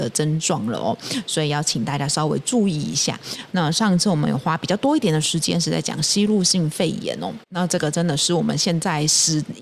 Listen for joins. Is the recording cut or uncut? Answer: cut